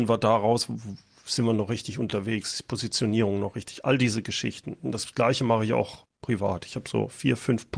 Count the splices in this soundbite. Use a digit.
0